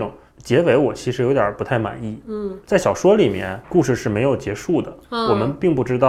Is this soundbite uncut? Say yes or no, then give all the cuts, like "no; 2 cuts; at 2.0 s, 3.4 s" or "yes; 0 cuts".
no; 2 cuts; at 3.6 s, 5.0 s